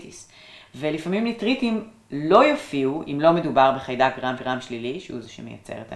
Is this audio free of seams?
no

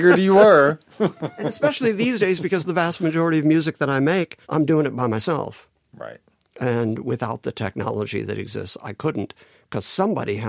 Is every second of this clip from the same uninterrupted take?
no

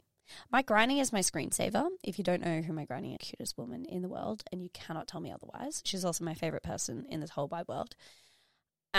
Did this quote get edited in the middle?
yes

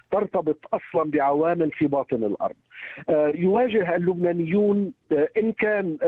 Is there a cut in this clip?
no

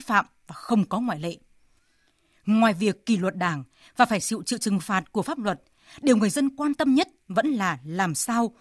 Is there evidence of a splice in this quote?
no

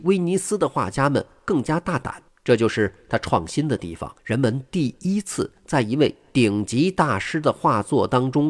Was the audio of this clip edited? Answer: yes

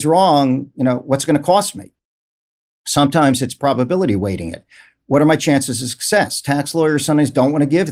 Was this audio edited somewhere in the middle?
no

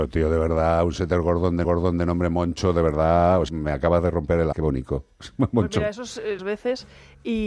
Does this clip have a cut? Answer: yes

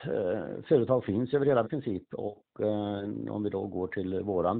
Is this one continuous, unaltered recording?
no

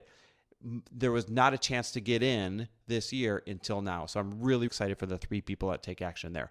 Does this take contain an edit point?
yes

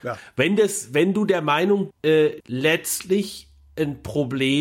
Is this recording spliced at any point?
yes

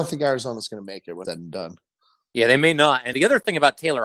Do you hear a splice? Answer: yes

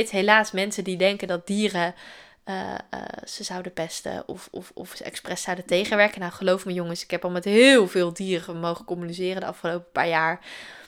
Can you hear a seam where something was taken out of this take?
no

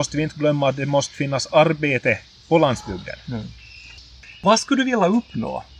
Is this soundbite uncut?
yes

